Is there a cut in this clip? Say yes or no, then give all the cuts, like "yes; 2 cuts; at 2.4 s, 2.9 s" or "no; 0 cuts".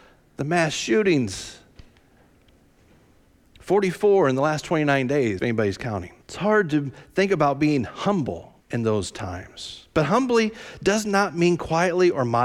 yes; 3 cuts; at 5.4 s, 6.2 s, 8.6 s